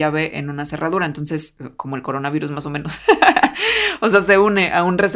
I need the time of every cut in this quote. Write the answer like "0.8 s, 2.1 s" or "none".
none